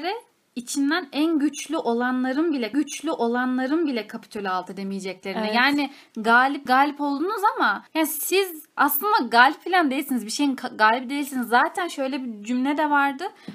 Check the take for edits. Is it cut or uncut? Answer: cut